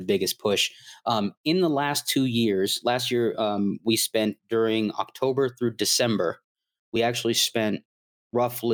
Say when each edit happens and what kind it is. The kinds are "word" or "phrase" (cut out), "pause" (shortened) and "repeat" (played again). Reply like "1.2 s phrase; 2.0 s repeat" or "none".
none

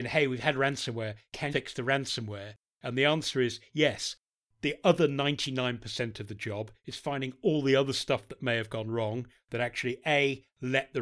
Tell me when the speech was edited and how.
1.5 s word

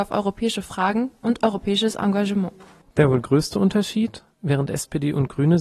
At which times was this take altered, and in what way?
none

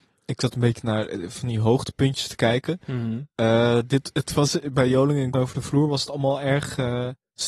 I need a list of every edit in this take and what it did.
5.3 s word

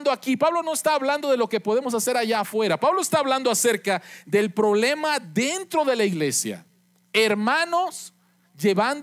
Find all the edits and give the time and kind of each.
none

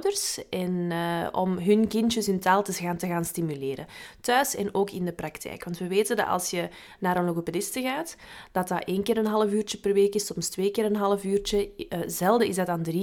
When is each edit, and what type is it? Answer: none

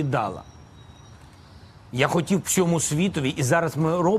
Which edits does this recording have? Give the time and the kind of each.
2.4 s word

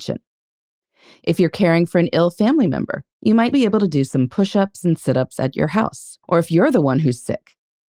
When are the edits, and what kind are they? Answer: 3.1 s pause; 3.5 s word; 6.2 s pause

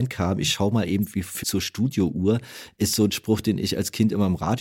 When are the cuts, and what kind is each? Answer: 1.4 s word

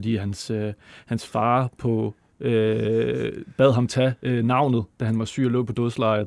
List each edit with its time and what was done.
2.3 s pause; 4.9 s pause

